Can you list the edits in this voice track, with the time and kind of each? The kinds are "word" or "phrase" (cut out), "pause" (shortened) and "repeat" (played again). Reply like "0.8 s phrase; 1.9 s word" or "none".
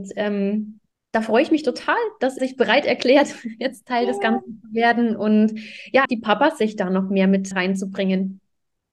0.9 s pause; 2.4 s word; 6.1 s word; 7.5 s word